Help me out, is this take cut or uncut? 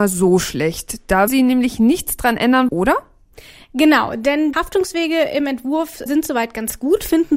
cut